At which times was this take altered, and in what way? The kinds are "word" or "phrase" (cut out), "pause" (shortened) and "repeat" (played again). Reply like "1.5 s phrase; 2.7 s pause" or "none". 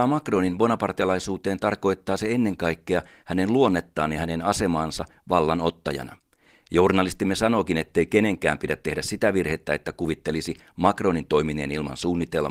none